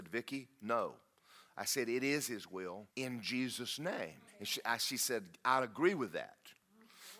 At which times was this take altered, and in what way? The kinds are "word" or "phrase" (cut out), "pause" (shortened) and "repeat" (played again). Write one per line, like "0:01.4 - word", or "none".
0:01.1 - pause
0:02.9 - pause
0:04.3 - pause